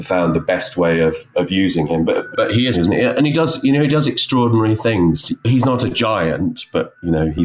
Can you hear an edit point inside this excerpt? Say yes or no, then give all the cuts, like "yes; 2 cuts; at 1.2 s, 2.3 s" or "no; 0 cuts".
yes; 3 cuts; at 1.3 s, 2.3 s, 2.7 s